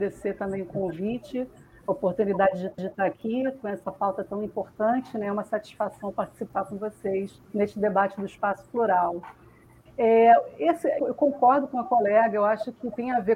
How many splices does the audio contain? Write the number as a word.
three